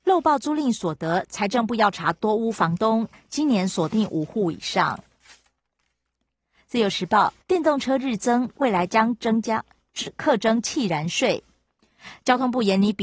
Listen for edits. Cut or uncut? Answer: cut